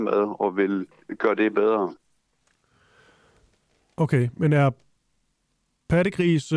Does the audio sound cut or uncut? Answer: uncut